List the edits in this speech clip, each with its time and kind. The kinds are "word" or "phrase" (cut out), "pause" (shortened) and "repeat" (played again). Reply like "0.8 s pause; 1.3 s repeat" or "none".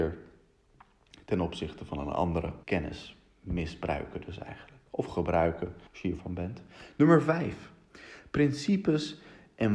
2.6 s pause; 5.9 s pause; 6.2 s word